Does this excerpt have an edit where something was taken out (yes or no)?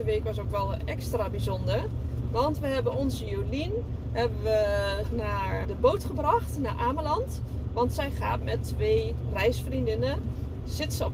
yes